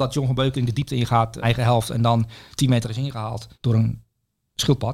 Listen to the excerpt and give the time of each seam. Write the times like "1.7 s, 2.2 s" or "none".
1.4 s, 2.8 s, 3.5 s